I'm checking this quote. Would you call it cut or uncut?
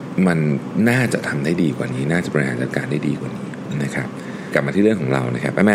cut